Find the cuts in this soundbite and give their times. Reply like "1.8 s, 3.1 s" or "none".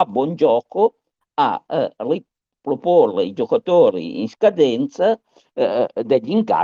none

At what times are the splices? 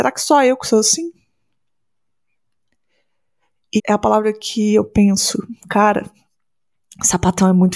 3.8 s, 5.6 s

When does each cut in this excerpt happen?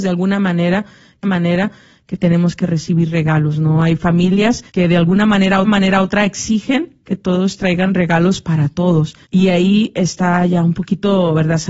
1.2 s, 4.7 s, 5.6 s, 9.2 s

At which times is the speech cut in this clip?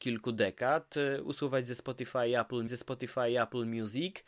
2.7 s

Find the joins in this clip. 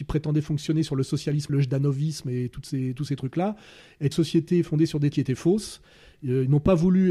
1.5 s, 4.1 s, 5.1 s

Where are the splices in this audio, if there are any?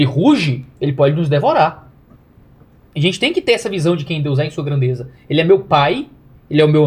none

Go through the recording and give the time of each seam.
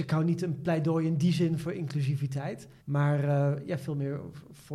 2.8 s

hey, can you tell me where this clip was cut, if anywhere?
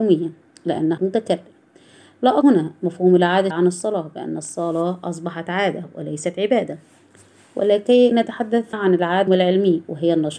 1.0 s, 2.4 s, 3.5 s, 8.1 s, 8.7 s, 9.3 s

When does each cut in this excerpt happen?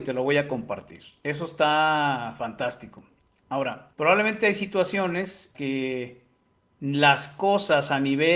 3.9 s, 5.5 s

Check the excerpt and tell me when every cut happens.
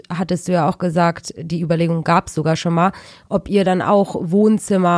none

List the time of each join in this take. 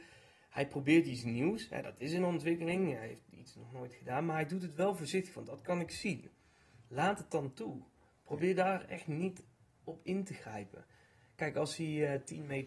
none

